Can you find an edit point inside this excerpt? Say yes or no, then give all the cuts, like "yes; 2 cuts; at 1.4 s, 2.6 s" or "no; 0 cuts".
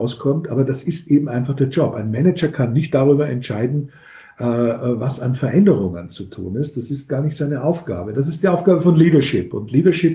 no; 0 cuts